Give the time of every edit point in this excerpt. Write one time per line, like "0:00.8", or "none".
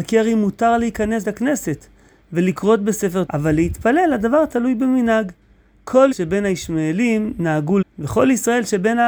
0:01.2
0:03.3
0:06.1
0:07.8